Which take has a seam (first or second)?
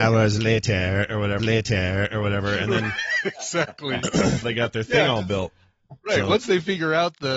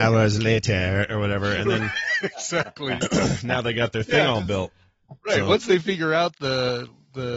first